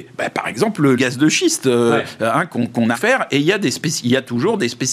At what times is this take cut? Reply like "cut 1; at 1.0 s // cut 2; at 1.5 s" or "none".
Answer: cut 1; at 0.9 s // cut 2; at 2.9 s